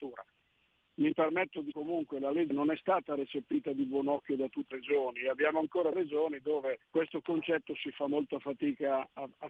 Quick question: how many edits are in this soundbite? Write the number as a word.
five